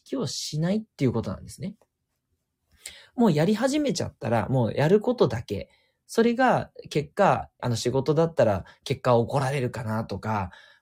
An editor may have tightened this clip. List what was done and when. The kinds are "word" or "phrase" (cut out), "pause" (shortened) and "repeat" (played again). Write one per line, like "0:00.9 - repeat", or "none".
0:00.9 - pause
0:07.6 - word

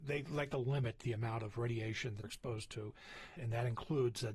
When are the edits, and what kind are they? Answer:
0:02.2 - word
0:03.4 - word

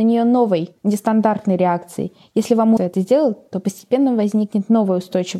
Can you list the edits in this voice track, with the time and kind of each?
0:02.8 - word

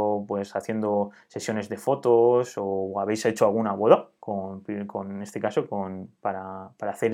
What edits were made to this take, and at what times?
none

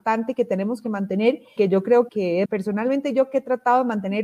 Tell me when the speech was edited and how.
0:01.6 - word
0:02.1 - word
0:02.5 - word

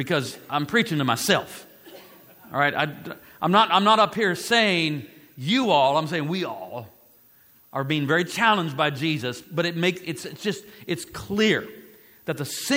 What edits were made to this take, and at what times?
none

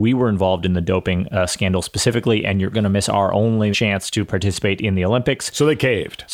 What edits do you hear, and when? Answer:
0:02.7 - word
0:03.7 - word

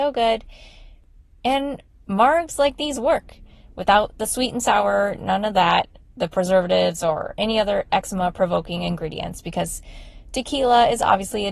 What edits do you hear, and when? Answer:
none

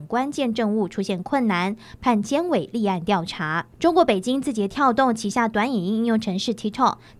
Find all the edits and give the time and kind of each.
0:03.7 - pause

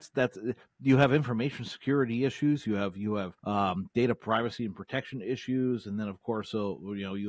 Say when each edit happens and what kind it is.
0:03.4 - pause

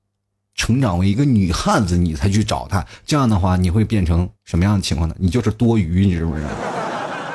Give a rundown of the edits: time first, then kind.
0:04.3 - pause

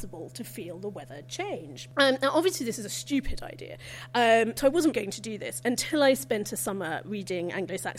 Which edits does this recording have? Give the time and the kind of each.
0:04.9 - word

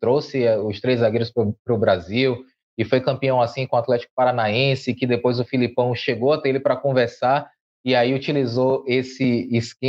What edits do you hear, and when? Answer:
none

